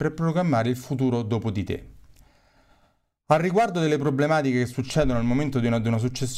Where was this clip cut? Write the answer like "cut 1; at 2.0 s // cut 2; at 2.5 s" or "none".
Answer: none